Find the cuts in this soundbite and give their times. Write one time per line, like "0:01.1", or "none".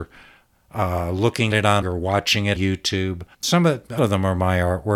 0:01.5
0:01.8
0:02.6
0:03.3
0:04.0